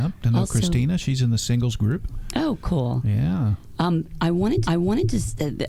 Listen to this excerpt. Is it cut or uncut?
cut